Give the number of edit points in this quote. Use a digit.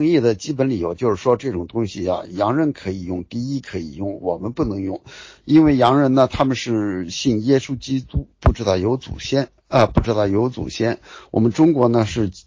1